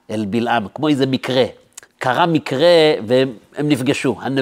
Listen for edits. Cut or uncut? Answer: cut